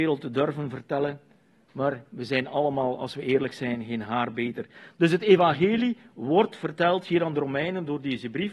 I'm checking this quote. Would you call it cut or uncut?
uncut